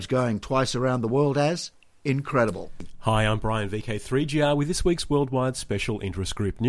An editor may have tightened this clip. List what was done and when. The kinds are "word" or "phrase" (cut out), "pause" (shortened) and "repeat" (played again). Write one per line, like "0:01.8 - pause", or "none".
none